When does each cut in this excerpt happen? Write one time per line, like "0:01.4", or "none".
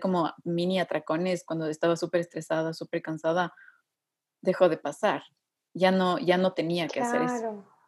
none